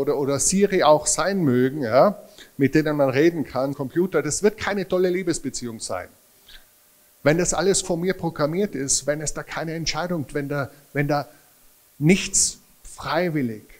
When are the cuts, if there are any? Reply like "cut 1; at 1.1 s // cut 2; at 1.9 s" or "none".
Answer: cut 1; at 3.7 s // cut 2; at 7.8 s // cut 3; at 10.3 s